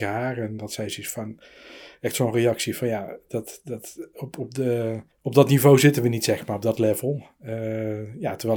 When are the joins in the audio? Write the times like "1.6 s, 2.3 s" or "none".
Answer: 5.1 s